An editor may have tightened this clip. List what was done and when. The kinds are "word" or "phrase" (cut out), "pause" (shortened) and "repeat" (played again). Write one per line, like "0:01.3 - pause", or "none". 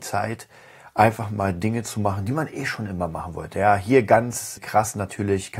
0:04.6 - word